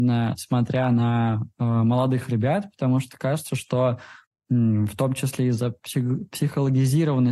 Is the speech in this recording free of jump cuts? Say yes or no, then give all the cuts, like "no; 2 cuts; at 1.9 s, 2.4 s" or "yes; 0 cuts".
yes; 0 cuts